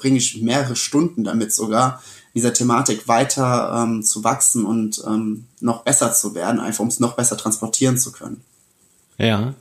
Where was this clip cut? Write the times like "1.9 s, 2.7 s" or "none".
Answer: none